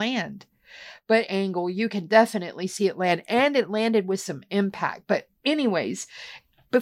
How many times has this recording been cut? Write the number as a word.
one